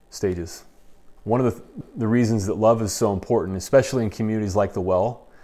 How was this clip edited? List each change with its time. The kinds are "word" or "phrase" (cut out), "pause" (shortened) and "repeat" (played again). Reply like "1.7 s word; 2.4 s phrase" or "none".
1.2 s pause; 1.8 s repeat